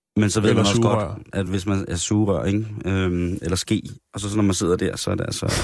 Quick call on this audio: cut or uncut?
uncut